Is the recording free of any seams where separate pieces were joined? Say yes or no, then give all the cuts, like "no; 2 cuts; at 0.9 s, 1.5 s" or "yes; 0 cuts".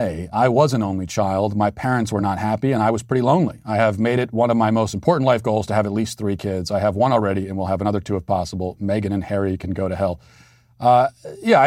yes; 0 cuts